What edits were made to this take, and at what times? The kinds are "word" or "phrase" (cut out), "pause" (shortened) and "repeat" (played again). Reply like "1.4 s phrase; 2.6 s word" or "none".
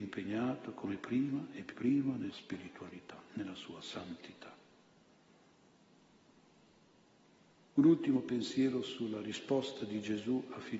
1.7 s word; 2.3 s phrase